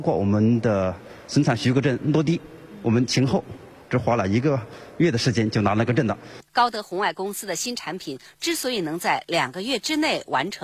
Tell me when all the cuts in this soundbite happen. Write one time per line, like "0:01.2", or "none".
0:06.5